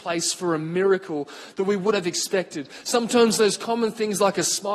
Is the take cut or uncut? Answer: cut